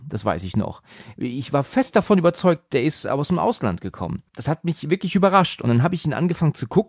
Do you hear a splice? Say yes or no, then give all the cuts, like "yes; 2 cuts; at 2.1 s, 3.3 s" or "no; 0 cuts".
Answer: yes; 1 cut; at 4.3 s